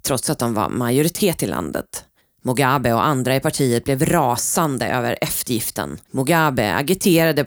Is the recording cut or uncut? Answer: cut